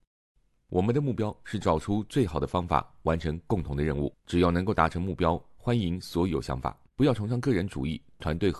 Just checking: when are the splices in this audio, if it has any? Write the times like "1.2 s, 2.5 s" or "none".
4.2 s, 6.9 s